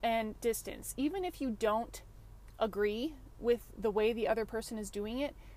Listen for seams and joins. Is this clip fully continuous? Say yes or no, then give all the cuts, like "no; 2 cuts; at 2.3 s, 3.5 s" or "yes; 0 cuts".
yes; 0 cuts